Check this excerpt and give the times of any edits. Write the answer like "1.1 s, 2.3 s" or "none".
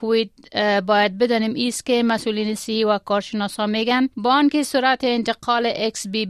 4.1 s